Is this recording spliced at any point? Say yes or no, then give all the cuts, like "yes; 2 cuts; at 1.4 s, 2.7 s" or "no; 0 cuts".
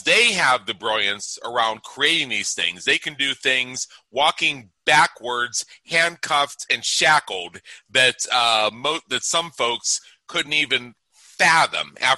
no; 0 cuts